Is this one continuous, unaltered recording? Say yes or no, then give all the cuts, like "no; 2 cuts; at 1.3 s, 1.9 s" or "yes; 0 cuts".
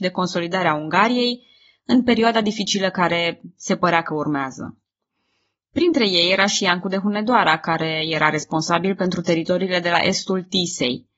yes; 0 cuts